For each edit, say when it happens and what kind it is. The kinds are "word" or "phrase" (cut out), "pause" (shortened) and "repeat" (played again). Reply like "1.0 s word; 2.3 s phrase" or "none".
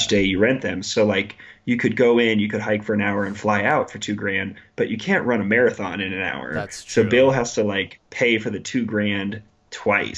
8.1 s pause